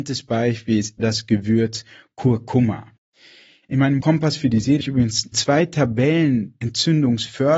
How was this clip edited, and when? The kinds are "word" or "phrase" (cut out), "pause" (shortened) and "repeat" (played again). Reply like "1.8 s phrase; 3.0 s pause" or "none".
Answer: 1.0 s word; 4.0 s word; 4.8 s word; 5.3 s word